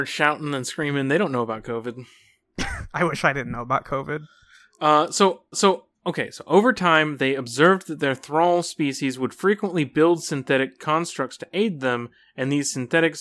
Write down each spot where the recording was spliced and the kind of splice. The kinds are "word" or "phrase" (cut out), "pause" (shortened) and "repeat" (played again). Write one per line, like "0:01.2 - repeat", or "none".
0:05.5 - repeat

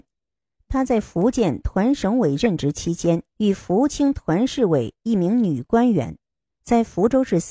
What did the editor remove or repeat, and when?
0:03.3 - pause

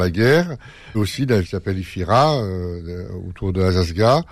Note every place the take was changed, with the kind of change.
0:00.9 - word
0:01.4 - word

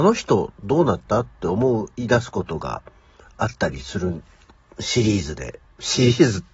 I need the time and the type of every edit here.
none

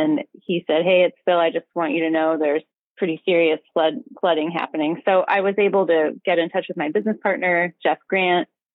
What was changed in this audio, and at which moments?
0:02.7 - pause

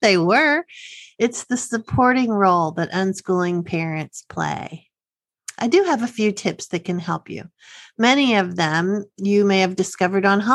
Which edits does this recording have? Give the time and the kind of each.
none

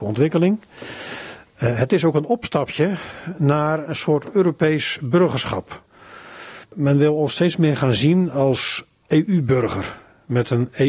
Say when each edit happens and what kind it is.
0:06.6 - pause

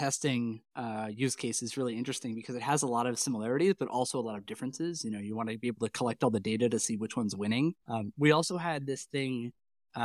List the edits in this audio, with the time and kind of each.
0:07.8 - pause

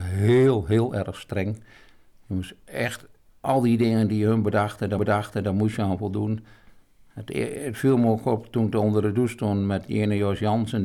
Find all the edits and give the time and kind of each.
0:03.3 - pause
0:05.0 - repeat

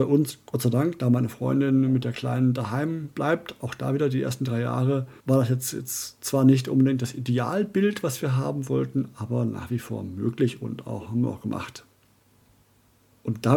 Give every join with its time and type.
0:05.2 - pause

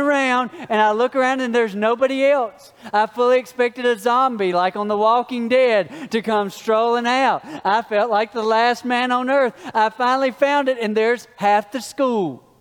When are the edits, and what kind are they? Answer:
none

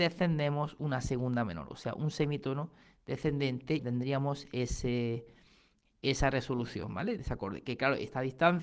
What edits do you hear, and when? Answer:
0:03.8 - word
0:07.2 - word

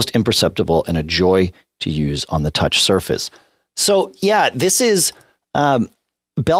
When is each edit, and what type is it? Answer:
none

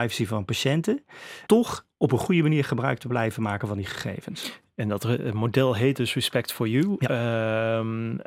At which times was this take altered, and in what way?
0:01.5 - word

